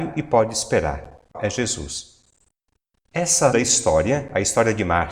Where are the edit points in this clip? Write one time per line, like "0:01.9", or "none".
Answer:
0:01.3
0:03.5